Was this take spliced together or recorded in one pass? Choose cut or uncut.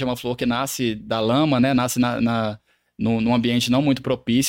uncut